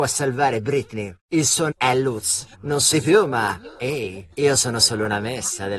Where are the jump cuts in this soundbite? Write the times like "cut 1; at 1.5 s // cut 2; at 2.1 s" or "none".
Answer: cut 1; at 1.2 s // cut 2; at 1.7 s // cut 3; at 2.5 s // cut 4; at 2.9 s // cut 5; at 4.3 s